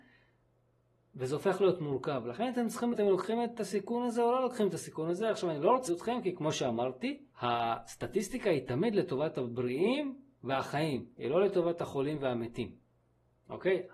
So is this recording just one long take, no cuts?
no; 3 cuts; at 2.9 s, 5.9 s, 7.3 s

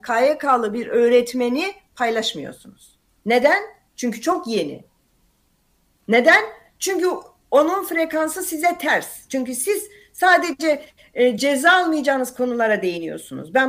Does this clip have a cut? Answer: no; 0 cuts

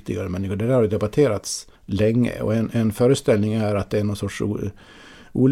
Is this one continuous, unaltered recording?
no; 1 cut; at 1.8 s

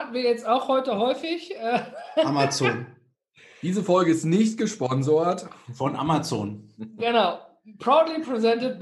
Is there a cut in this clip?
no; 0 cuts

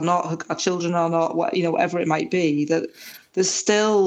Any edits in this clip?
no; 0 cuts

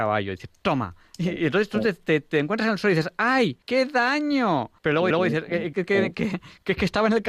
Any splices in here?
yes; 4 cuts; at 3.6 s, 4.8 s, 5.1 s, 5.7 s

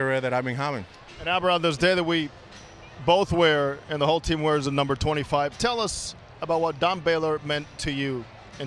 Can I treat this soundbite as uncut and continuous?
yes; 0 cuts

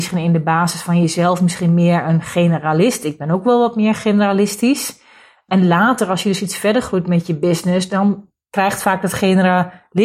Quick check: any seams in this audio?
no; 0 cuts

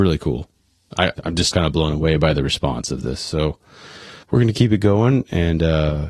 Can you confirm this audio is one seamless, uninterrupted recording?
no; 3 cuts; at 1.1 s, 1.5 s, 4.2 s

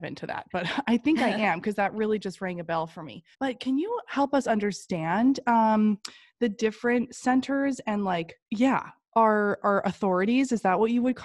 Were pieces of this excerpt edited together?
yes; 2 cuts; at 3.3 s, 8.4 s

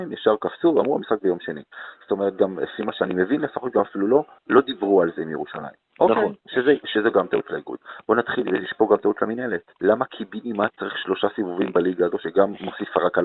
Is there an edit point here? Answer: yes; 3 cuts; at 4.4 s, 5.9 s, 9.8 s

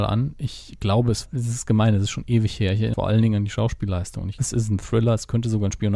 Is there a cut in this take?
yes; 3 cuts; at 1.3 s, 2.9 s, 4.4 s

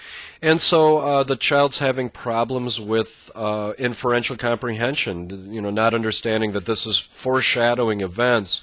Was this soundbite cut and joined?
no; 0 cuts

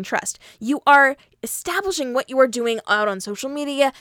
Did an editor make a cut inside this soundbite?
no; 0 cuts

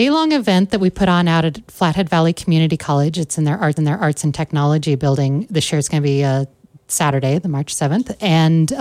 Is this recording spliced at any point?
yes; 1 cut; at 3.8 s

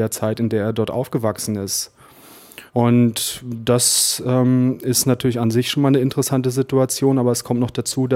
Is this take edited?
yes; 1 cut; at 2.7 s

